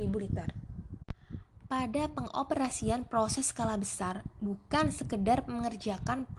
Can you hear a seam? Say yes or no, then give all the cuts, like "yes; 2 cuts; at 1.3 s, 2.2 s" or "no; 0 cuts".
no; 0 cuts